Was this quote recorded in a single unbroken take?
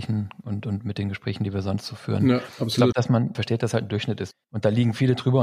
no; 2 cuts; at 2.9 s, 4.4 s

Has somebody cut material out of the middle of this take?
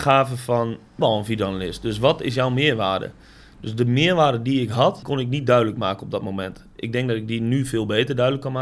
yes; 2 cuts; at 1.0 s, 5.0 s

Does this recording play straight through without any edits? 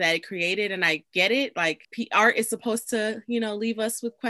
no; 1 cut; at 1.8 s

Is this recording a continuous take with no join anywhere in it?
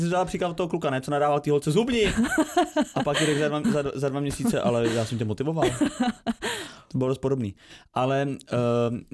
no; 1 cut; at 3.6 s

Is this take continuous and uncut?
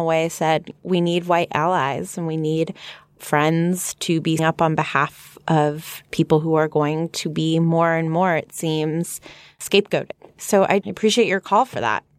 no; 3 cuts; at 3.2 s, 4.4 s, 10.8 s

